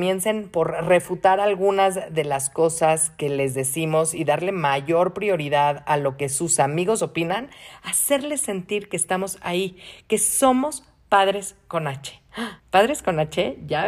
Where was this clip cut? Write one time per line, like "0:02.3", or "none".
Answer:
0:12.6